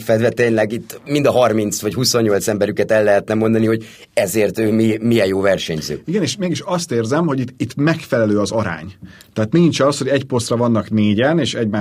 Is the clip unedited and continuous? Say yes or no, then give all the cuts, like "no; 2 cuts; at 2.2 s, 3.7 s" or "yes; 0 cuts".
yes; 0 cuts